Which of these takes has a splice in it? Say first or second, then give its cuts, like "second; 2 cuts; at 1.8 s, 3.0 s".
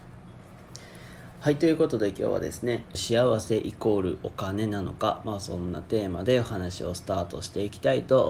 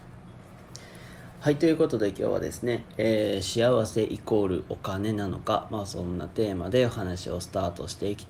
first; 1 cut; at 2.9 s